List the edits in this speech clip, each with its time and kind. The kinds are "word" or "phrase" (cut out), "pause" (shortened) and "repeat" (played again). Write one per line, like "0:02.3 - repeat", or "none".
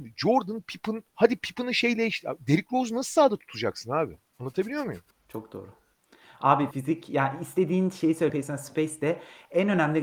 0:01.1 - pause
0:04.3 - pause
0:05.1 - pause
0:06.7 - word
0:08.3 - word